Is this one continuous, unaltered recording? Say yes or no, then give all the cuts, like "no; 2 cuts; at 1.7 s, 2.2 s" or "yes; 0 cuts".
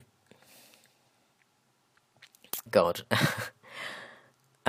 no; 1 cut; at 2.7 s